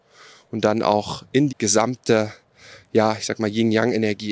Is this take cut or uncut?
cut